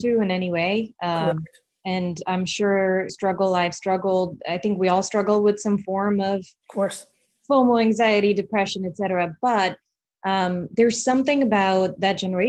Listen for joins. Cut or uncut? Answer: cut